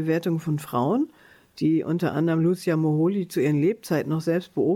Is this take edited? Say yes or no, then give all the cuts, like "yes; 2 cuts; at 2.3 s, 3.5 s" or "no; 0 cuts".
no; 0 cuts